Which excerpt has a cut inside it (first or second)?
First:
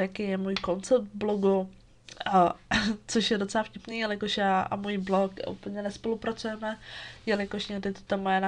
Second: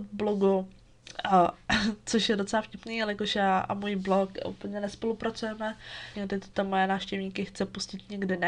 second